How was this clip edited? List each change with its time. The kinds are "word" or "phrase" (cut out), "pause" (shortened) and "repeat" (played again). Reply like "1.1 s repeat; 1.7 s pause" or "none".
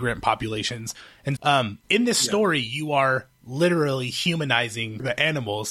1.3 s word; 1.8 s pause